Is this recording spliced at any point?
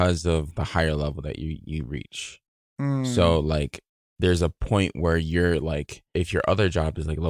no; 0 cuts

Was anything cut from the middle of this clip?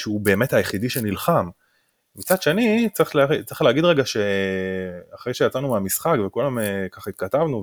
no; 0 cuts

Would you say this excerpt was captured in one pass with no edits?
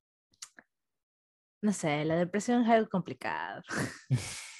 yes; 0 cuts

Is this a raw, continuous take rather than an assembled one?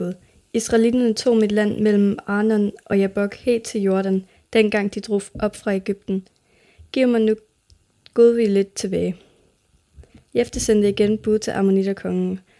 yes; 0 cuts

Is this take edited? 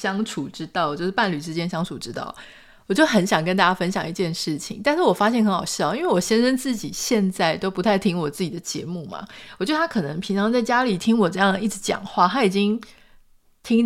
no; 0 cuts

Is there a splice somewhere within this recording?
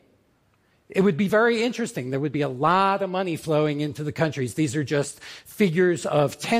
no; 0 cuts

